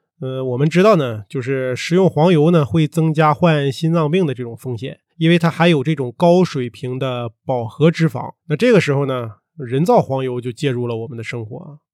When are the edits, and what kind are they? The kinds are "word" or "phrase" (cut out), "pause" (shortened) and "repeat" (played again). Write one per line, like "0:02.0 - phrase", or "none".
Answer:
0:05.1 - pause
0:08.4 - pause